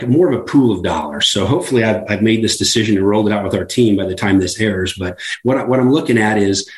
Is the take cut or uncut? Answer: uncut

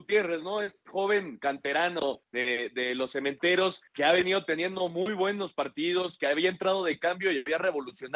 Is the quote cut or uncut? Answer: cut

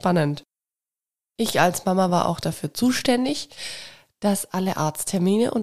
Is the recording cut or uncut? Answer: uncut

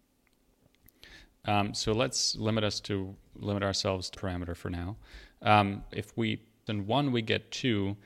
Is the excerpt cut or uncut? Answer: cut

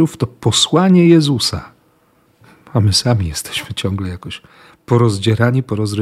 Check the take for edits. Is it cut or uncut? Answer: uncut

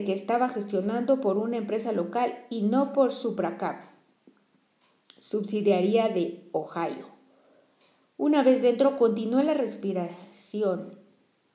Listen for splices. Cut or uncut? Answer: uncut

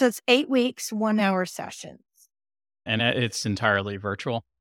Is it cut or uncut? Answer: uncut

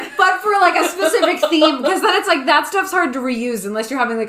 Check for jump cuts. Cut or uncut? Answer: uncut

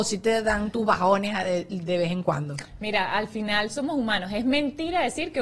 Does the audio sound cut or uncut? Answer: uncut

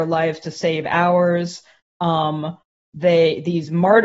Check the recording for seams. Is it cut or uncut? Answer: uncut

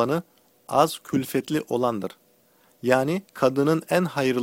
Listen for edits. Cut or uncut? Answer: cut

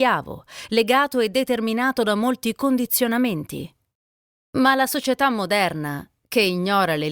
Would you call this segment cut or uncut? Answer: uncut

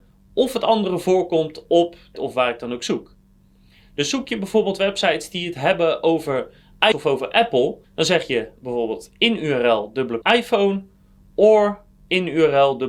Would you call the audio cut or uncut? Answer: cut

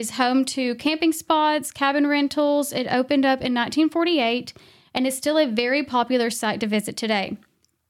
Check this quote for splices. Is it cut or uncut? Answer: uncut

